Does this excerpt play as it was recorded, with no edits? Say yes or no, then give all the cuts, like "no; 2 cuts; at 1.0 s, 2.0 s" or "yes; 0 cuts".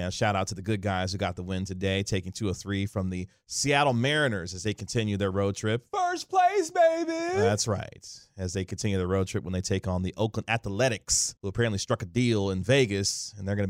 no; 1 cut; at 11.4 s